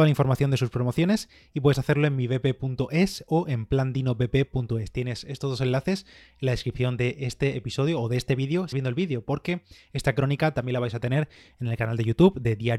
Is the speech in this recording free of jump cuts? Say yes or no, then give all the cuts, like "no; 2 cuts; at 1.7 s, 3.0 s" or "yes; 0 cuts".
no; 1 cut; at 8.7 s